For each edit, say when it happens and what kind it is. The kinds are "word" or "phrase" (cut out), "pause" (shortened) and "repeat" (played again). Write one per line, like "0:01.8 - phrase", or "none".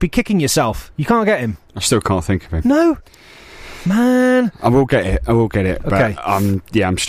none